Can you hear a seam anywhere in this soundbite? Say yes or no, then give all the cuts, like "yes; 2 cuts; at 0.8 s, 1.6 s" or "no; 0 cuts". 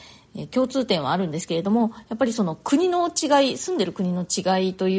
no; 0 cuts